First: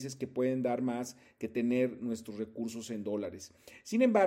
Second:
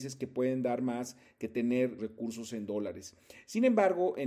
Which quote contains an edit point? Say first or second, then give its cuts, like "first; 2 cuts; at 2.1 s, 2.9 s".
second; 1 cut; at 2.0 s